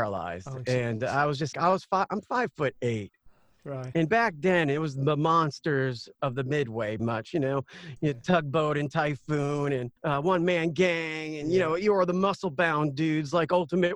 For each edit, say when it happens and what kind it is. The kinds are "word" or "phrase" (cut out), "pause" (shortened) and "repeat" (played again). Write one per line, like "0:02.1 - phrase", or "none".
0:01.5 - word
0:07.0 - word
0:10.0 - pause

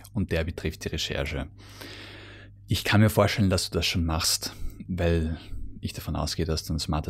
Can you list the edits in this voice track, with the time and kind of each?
none

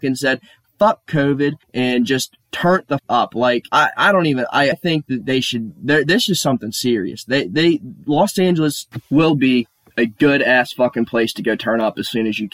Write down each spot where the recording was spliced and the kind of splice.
0:01.6 - pause
0:02.4 - pause
0:03.0 - word
0:03.7 - pause
0:04.7 - word
0:05.2 - word

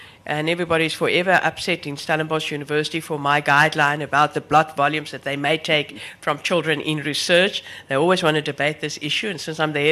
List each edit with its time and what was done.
none

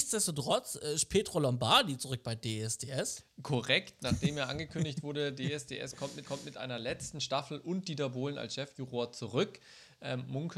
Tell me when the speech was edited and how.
0:06.2 - repeat

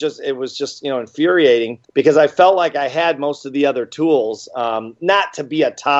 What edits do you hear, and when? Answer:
0:01.8 - pause

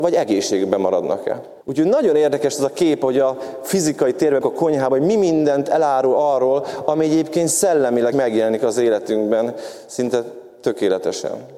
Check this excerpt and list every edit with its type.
0:01.6 - pause
0:04.4 - word
0:08.1 - word

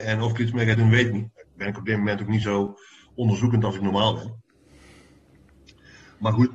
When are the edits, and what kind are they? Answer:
none

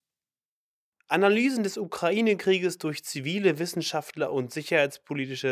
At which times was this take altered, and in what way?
none

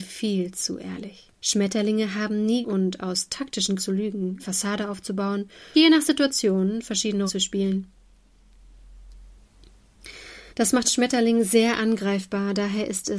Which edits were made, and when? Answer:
0:01.4 - pause
0:02.6 - phrase
0:03.8 - word
0:04.4 - word
0:05.7 - word
0:07.3 - word
0:10.5 - pause
0:10.8 - word

